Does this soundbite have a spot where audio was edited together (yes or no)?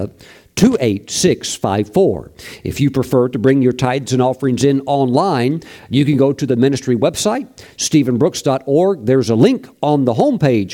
no